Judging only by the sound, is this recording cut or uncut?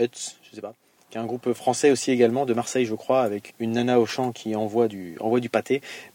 cut